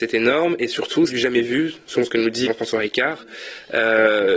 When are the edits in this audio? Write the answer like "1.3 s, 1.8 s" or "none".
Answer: 1.1 s, 2.4 s